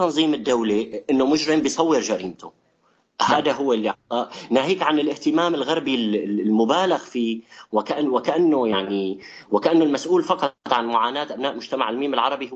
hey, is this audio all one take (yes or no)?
yes